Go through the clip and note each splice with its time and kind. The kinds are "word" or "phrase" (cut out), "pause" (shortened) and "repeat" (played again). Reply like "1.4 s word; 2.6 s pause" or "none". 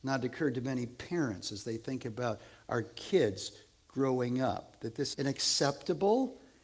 5.1 s word